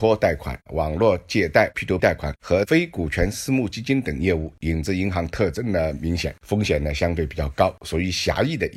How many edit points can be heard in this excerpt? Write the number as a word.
one